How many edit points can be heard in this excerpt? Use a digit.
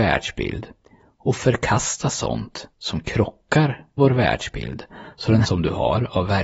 3